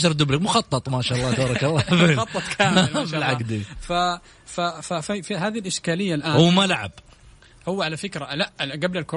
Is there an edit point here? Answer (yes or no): no